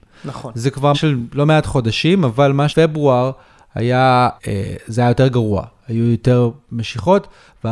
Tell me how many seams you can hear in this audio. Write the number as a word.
three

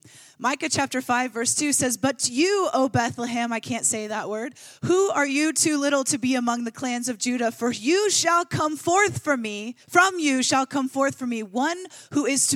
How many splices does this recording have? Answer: one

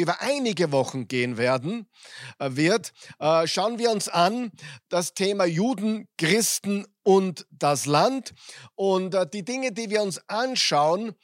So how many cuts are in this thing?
zero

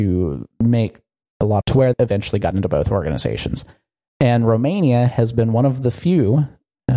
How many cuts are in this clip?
three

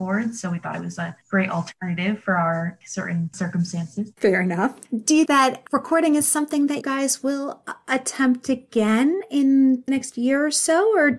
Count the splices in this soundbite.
four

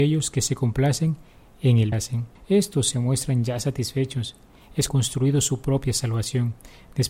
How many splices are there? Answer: three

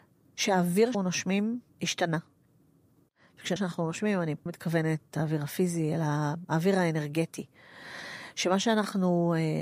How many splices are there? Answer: four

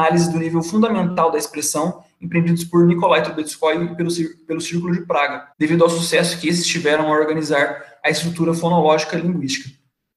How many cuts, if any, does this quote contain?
one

